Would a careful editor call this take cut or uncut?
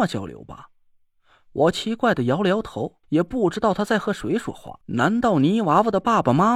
cut